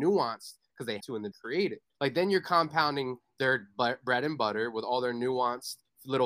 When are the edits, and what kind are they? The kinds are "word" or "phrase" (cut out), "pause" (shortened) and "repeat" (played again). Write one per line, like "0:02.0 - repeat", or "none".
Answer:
0:01.0 - word
0:01.3 - phrase
0:01.9 - pause

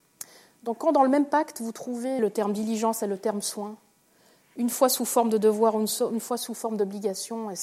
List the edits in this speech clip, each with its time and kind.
0:02.2 - word

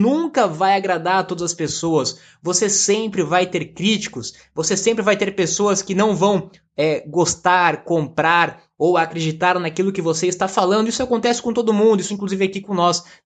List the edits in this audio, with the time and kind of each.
0:12.1 - word

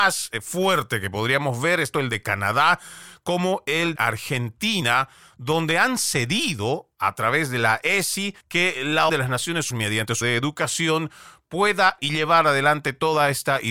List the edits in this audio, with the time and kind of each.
0:01.9 - word
0:04.0 - word
0:08.4 - pause
0:09.1 - word
0:09.7 - word
0:10.2 - word
0:12.0 - phrase

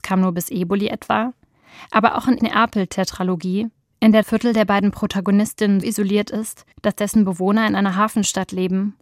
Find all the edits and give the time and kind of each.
0:02.4 - phrase
0:04.2 - word
0:05.8 - word
0:06.7 - pause

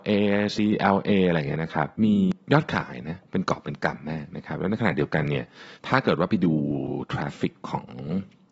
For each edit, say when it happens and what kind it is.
0:01.9 - pause
0:05.7 - pause

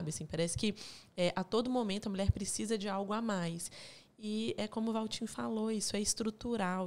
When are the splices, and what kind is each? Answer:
none

